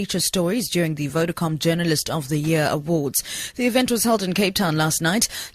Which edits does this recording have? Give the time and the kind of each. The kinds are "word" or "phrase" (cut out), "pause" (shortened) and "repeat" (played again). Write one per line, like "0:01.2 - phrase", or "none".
none